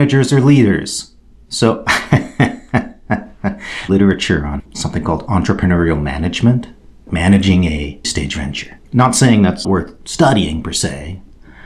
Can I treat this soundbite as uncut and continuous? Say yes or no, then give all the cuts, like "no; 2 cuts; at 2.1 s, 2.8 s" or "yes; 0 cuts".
no; 6 cuts; at 3.9 s, 4.7 s, 7.1 s, 8.0 s, 8.9 s, 9.6 s